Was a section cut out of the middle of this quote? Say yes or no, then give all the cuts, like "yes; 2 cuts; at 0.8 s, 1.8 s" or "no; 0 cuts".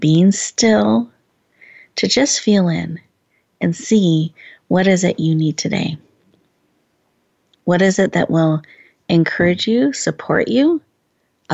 no; 0 cuts